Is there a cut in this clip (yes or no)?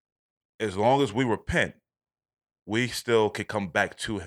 no